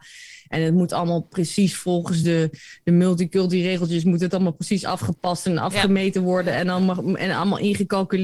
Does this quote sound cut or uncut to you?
uncut